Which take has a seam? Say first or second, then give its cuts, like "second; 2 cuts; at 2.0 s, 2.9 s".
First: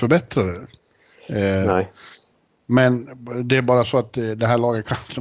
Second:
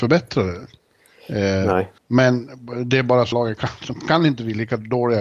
second; 2 cuts; at 2.0 s, 3.3 s